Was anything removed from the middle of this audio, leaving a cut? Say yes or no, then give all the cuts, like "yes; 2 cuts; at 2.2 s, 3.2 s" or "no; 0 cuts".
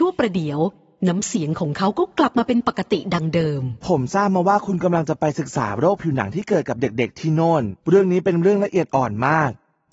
yes; 1 cut; at 7.8 s